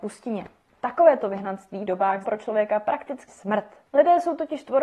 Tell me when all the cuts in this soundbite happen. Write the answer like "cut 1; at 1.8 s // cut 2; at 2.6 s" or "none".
cut 1; at 1.9 s // cut 2; at 2.2 s // cut 3; at 3.3 s